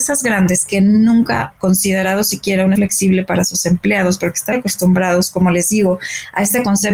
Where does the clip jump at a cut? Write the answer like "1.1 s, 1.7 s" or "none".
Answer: 1.5 s, 2.8 s, 4.5 s